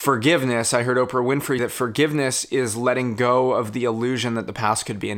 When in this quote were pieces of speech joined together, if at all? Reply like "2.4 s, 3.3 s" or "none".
1.6 s

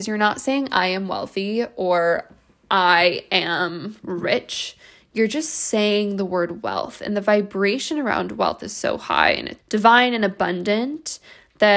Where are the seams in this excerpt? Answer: 9.6 s

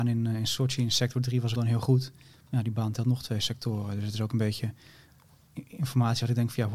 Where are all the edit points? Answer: 1.6 s

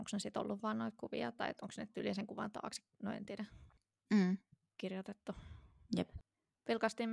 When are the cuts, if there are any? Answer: none

